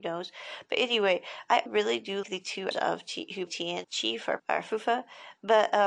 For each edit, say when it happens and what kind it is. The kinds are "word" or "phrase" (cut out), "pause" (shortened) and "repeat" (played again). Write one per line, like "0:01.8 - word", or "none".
0:01.7 - word
0:02.2 - word
0:02.7 - word
0:03.5 - word
0:03.8 - word
0:04.4 - word

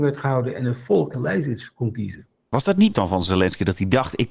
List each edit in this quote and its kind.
0:01.1 - word
0:02.9 - word

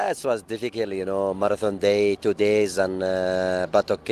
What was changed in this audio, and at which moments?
none

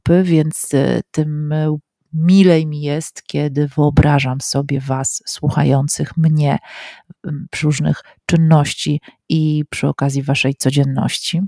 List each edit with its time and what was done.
0:07.6 - word

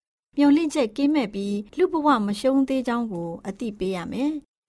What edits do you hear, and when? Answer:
0:01.7 - pause

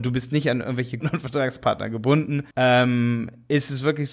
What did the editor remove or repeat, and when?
0:01.0 - word
0:02.5 - pause

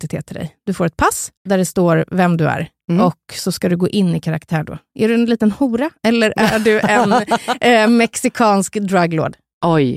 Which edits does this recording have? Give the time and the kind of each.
0:01.4 - pause

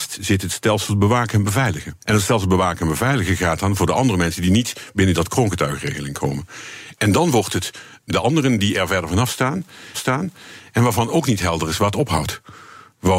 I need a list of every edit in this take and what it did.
0:02.0 - pause
0:08.1 - word
0:09.9 - repeat

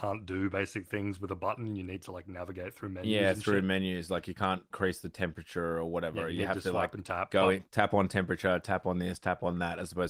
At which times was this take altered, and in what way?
0:07.7 - pause

